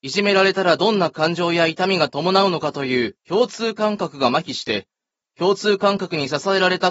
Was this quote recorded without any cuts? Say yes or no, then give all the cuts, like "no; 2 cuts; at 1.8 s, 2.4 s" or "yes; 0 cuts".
yes; 0 cuts